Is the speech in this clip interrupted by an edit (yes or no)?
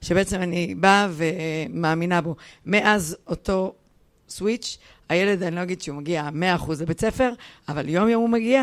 no